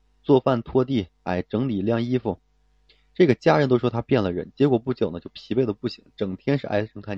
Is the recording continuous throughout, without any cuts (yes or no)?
yes